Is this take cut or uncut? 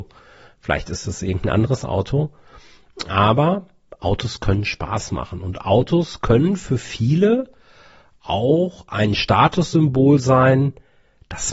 uncut